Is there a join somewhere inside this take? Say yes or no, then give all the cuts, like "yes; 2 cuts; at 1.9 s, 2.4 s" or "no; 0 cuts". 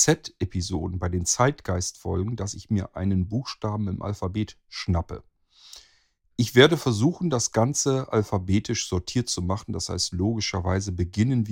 no; 0 cuts